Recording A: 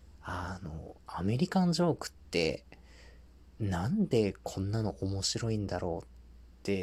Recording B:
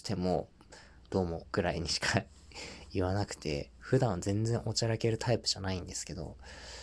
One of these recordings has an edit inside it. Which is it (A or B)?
B